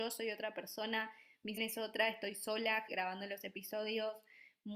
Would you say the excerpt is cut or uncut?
cut